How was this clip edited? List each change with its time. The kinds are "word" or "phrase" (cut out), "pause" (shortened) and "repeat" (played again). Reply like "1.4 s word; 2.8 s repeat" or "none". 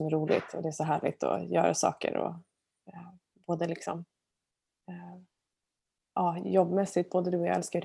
none

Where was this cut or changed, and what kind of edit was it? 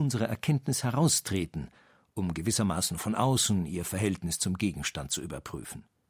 none

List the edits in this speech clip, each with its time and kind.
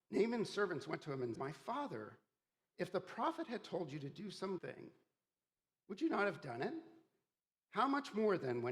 1.3 s word; 4.6 s word

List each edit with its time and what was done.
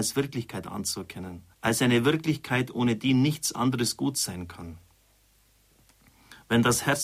1.5 s pause

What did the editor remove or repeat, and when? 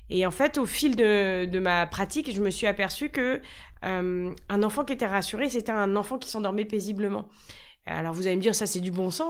none

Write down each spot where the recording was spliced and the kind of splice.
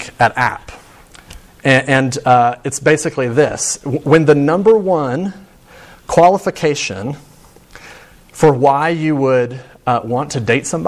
none

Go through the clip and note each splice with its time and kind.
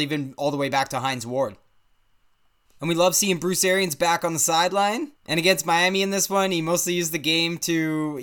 none

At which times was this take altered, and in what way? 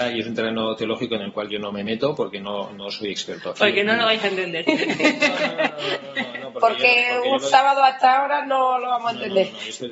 none

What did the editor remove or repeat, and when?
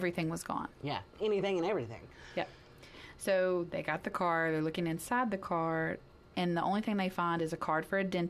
none

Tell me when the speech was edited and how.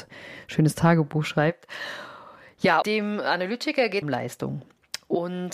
2.8 s word; 4.0 s phrase

